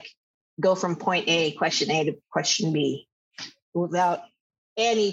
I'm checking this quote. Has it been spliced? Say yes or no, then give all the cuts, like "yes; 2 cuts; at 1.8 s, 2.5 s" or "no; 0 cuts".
no; 0 cuts